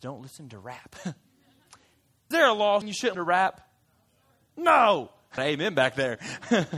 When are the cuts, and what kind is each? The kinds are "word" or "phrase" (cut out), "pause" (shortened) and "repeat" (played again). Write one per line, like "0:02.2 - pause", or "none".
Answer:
0:02.3 - word
0:02.8 - word
0:03.1 - word
0:05.4 - word